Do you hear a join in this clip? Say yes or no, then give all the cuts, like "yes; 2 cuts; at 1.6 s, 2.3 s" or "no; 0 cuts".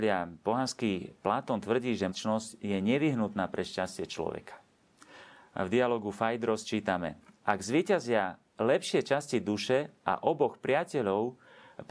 yes; 1 cut; at 2.1 s